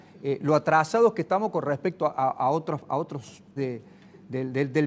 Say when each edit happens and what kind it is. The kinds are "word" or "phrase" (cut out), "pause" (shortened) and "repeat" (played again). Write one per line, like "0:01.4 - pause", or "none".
0:03.6 - word